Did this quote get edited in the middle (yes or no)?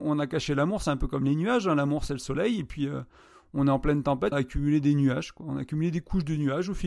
yes